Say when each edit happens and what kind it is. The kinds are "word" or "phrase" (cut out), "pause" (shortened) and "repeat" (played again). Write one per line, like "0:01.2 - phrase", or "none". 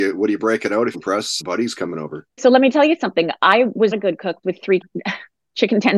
0:00.9 - phrase
0:01.4 - word
0:02.4 - word
0:03.9 - word
0:04.4 - word
0:04.8 - phrase